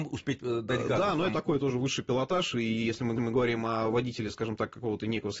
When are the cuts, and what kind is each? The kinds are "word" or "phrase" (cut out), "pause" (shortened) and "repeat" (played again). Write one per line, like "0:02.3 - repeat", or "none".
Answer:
0:01.3 - word
0:03.2 - repeat